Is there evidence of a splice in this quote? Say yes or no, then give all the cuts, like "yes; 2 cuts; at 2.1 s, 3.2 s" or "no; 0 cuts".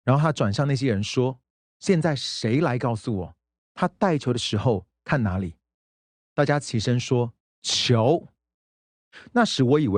no; 0 cuts